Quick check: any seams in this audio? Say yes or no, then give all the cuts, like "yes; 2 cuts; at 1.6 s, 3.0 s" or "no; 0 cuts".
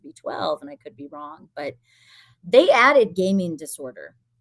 no; 0 cuts